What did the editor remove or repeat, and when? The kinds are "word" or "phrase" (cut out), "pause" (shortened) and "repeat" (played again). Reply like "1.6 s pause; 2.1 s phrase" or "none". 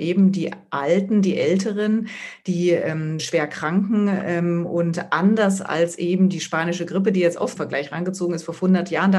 3.2 s word; 7.6 s word